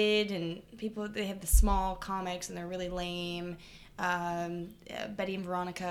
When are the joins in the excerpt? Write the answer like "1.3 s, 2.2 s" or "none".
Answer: none